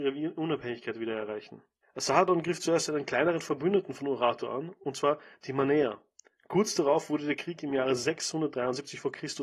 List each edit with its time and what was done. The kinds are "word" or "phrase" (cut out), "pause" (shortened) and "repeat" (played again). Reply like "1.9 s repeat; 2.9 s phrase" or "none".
1.8 s pause